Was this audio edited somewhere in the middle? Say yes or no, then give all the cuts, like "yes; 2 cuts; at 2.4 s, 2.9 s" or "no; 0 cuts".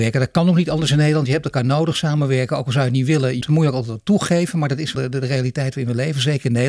yes; 2 cuts; at 3.4 s, 4.9 s